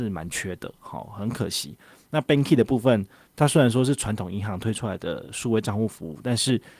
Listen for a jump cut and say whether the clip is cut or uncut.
uncut